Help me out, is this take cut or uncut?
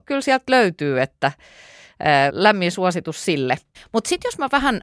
cut